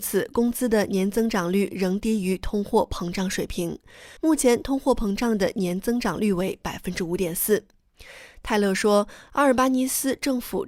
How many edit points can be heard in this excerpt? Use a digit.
1